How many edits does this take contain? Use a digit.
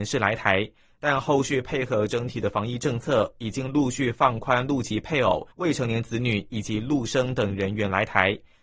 1